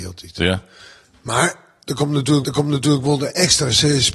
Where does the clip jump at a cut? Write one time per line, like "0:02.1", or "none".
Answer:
0:02.4